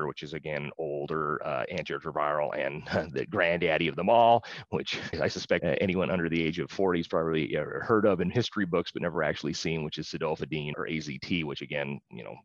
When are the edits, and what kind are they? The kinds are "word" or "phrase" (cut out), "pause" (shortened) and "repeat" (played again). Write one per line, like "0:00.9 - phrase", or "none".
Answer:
none